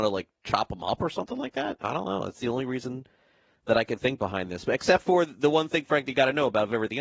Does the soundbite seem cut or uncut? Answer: uncut